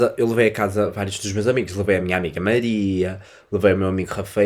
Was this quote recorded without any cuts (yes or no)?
yes